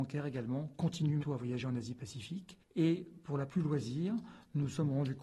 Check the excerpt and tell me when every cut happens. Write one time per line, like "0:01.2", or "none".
0:01.2
0:03.5